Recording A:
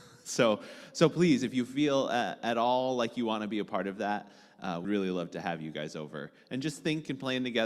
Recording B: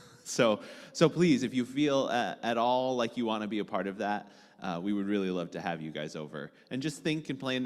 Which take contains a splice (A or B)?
A